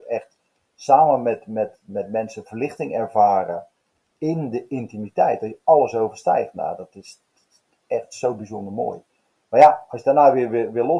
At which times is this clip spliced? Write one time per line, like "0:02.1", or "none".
none